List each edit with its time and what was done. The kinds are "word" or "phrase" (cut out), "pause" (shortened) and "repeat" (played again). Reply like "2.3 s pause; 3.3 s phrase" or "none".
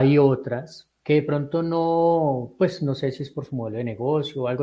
0.9 s pause